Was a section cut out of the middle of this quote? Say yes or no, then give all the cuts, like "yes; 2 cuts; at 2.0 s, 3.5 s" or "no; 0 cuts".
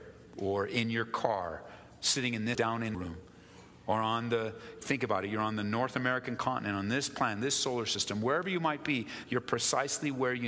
yes; 3 cuts; at 2.5 s, 2.9 s, 4.8 s